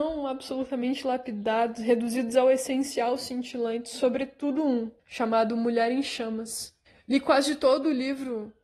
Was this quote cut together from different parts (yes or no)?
yes